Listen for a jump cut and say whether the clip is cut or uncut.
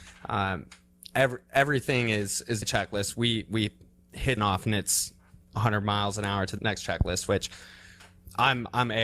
cut